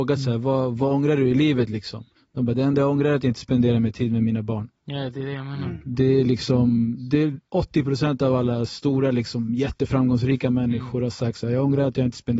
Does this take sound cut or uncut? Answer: cut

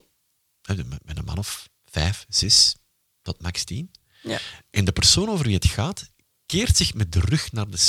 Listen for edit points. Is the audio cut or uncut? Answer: uncut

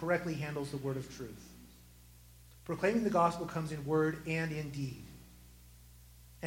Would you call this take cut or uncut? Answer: uncut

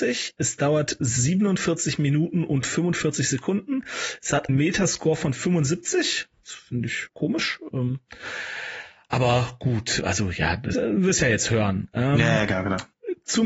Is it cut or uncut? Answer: cut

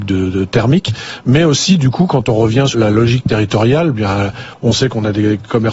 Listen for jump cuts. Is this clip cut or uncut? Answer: cut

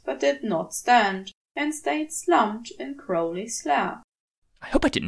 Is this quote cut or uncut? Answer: uncut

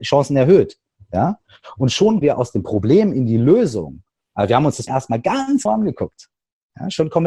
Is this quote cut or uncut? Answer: cut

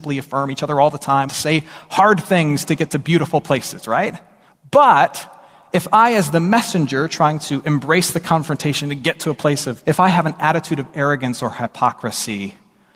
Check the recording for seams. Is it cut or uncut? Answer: cut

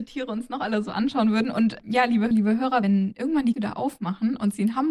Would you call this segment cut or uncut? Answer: cut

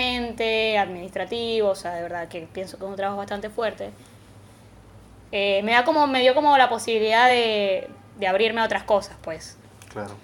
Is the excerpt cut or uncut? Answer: uncut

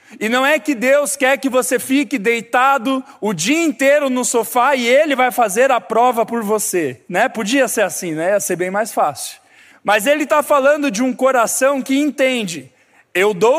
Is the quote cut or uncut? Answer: cut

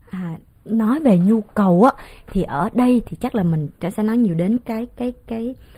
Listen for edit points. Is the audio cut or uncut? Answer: uncut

